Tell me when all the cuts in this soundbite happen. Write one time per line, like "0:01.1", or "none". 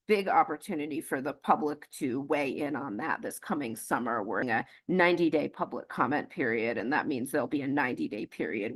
0:04.4